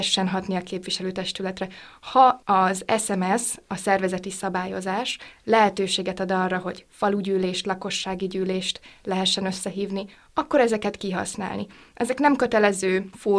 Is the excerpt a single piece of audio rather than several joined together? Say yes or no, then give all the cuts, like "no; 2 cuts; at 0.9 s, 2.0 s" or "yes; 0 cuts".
yes; 0 cuts